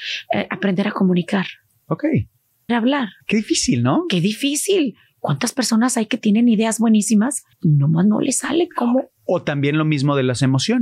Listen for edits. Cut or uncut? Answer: cut